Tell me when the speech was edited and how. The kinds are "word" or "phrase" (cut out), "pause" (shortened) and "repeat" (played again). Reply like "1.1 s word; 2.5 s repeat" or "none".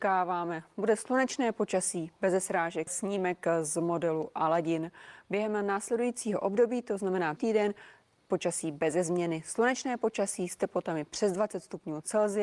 2.9 s phrase; 7.4 s word